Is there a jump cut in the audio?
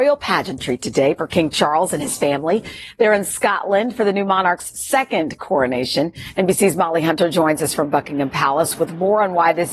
no; 0 cuts

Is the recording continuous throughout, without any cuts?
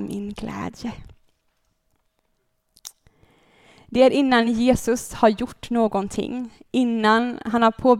yes; 0 cuts

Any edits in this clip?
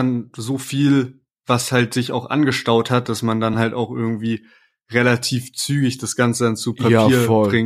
no; 0 cuts

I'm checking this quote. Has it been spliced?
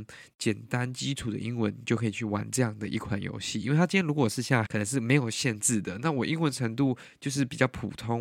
yes; 1 cut; at 4.7 s

